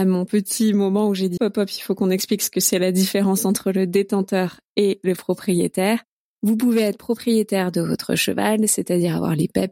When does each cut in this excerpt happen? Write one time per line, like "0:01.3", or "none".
0:01.4